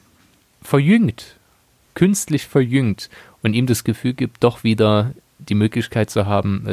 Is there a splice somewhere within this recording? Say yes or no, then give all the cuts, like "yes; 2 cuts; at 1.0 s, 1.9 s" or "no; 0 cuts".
no; 0 cuts